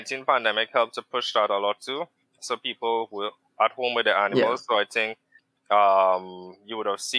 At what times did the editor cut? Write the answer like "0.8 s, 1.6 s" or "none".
5.4 s